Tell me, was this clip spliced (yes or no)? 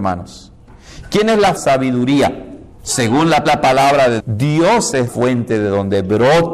yes